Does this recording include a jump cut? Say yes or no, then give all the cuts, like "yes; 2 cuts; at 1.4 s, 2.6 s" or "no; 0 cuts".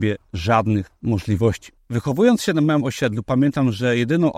no; 0 cuts